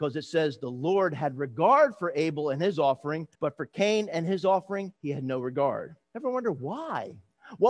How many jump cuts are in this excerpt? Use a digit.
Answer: 3